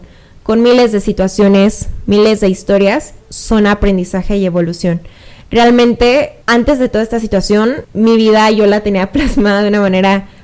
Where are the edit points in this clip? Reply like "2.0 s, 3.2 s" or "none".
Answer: 3.2 s